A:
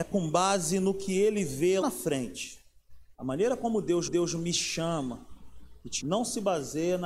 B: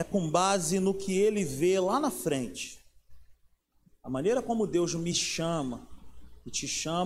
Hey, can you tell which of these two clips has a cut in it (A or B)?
A